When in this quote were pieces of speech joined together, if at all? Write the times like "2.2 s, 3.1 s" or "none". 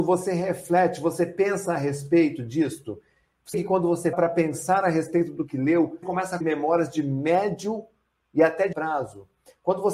3.5 s, 4.1 s, 6.0 s, 6.4 s, 8.7 s